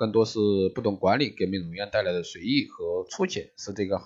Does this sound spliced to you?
no; 0 cuts

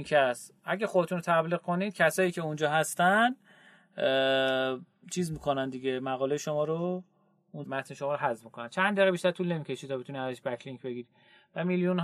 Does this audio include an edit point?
yes; 1 cut; at 7.7 s

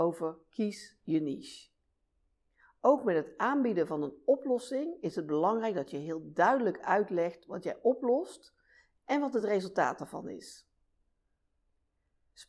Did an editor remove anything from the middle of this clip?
no; 0 cuts

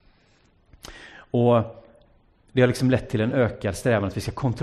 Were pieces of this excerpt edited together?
no; 0 cuts

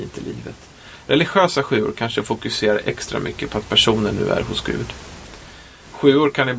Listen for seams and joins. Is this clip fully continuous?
yes; 0 cuts

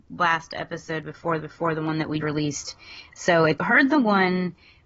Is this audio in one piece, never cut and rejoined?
no; 3 cuts; at 1.4 s, 2.2 s, 3.6 s

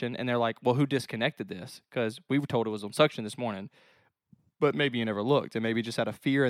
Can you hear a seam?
no; 0 cuts

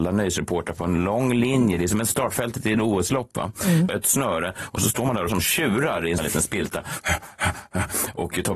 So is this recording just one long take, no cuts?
no; 3 cuts; at 4.0 s, 5.3 s, 6.2 s

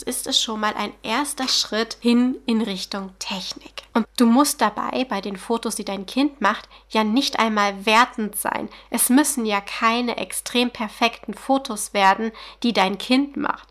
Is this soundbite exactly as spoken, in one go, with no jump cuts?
no; 1 cut; at 4.0 s

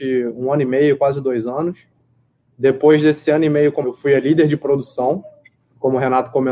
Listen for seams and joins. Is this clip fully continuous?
no; 1 cut; at 3.8 s

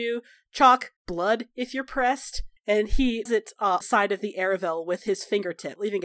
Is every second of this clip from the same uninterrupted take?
no; 4 cuts; at 1.0 s, 2.6 s, 3.3 s, 3.8 s

